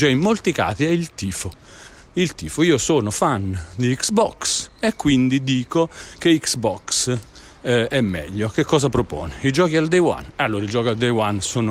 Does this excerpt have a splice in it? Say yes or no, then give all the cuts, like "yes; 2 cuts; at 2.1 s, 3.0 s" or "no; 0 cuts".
no; 0 cuts